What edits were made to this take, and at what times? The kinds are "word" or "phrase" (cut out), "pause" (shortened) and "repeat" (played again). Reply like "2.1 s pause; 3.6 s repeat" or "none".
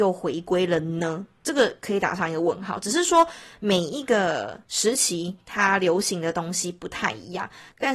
4.6 s pause